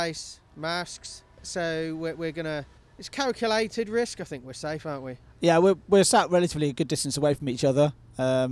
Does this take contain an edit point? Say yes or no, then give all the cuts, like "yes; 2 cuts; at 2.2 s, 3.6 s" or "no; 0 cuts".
yes; 1 cut; at 2.8 s